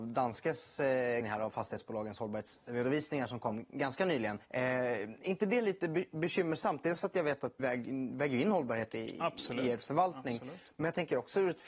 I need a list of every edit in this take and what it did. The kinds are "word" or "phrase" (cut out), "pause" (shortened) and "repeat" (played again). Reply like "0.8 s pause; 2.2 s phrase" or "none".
1.2 s word; 4.4 s pause; 7.6 s word